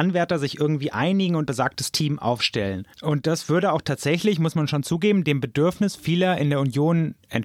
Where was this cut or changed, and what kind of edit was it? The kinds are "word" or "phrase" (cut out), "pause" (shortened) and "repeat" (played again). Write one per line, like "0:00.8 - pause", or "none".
0:01.5 - word
0:02.9 - pause